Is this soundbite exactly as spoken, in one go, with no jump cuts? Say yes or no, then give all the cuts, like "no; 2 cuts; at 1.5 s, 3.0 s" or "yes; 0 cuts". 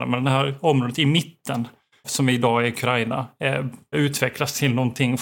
no; 2 cuts; at 2.0 s, 3.9 s